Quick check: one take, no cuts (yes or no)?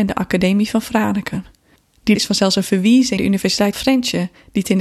no